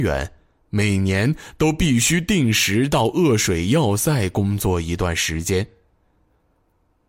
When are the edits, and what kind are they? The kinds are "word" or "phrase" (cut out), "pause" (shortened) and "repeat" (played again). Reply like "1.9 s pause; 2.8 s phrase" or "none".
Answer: none